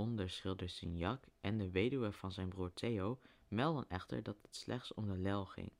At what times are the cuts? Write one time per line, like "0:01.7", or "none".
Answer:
none